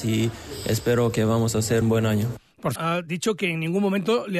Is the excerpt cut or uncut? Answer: cut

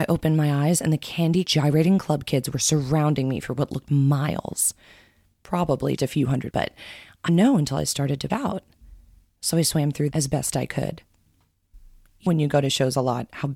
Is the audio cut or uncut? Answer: cut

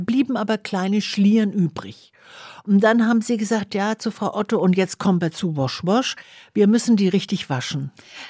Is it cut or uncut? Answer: uncut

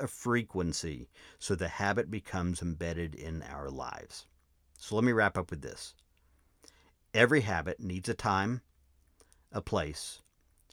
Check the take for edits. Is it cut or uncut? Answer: uncut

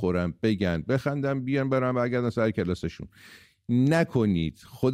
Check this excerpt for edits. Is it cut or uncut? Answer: uncut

